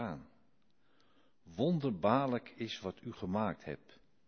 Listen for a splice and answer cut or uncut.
uncut